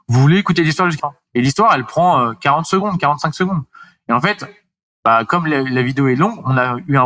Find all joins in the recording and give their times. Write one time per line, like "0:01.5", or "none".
0:01.0